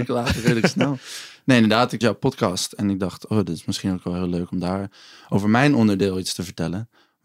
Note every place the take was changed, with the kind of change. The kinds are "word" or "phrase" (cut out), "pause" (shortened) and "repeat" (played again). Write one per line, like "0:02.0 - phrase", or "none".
0:02.0 - word